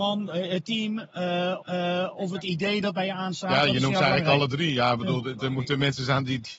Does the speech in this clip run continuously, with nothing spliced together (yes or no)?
no